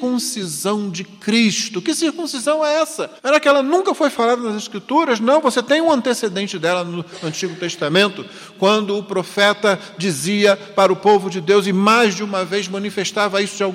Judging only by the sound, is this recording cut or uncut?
cut